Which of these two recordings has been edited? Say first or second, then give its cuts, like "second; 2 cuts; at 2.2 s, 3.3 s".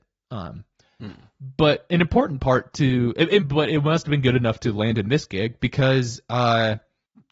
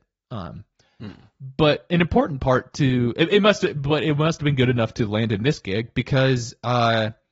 first; 1 cut; at 3.4 s